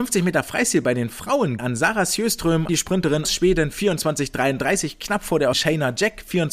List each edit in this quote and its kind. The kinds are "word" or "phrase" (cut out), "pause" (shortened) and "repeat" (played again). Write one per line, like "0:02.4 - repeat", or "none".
0:01.6 - word
0:02.7 - word
0:03.2 - word
0:05.5 - word